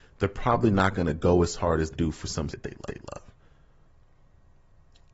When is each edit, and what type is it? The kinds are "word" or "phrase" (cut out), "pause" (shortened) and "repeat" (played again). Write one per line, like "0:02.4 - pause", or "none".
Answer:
0:01.9 - word
0:02.5 - word
0:02.9 - repeat